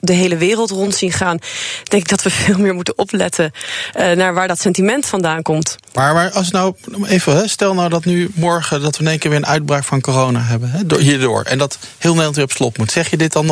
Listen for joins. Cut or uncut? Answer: uncut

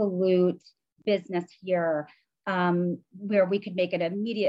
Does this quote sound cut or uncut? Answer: uncut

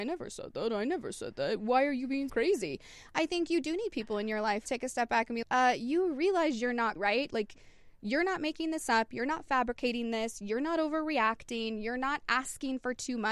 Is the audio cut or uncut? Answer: cut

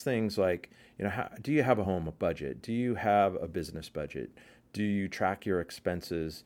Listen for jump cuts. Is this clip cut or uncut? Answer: uncut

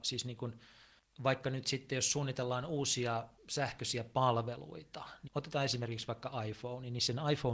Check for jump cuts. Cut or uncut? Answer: cut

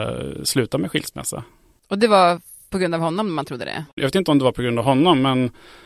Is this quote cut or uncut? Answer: uncut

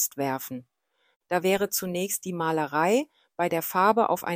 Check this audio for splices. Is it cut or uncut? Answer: uncut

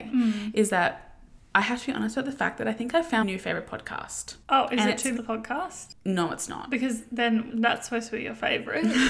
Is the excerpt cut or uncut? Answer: cut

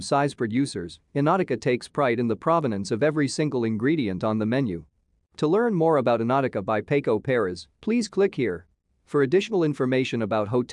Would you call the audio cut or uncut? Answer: uncut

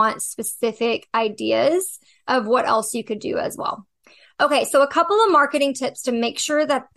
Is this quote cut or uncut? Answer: uncut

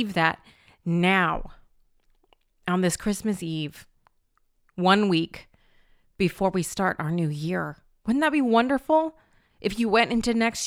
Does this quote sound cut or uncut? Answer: uncut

